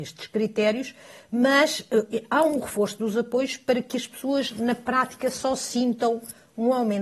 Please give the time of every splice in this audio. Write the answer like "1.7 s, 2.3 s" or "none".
none